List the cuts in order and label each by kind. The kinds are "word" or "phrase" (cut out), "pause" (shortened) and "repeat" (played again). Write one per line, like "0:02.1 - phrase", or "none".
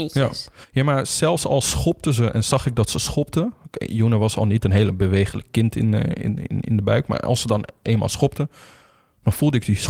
none